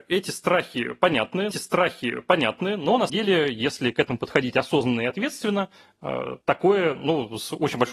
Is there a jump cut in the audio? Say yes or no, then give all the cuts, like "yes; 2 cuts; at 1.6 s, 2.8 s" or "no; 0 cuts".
yes; 3 cuts; at 1.5 s, 3.1 s, 6.4 s